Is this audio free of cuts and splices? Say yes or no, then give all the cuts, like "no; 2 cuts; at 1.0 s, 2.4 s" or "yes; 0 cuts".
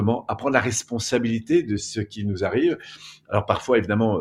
yes; 0 cuts